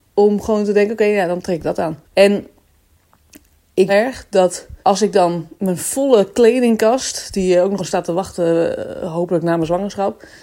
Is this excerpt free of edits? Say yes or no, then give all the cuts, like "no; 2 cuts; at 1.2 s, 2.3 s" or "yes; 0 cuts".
no; 5 cuts; at 2.0 s, 3.9 s, 4.8 s, 5.6 s, 7.8 s